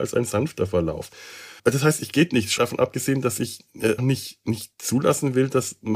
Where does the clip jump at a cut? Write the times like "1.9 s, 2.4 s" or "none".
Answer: 1.6 s, 2.1 s, 2.6 s, 4.0 s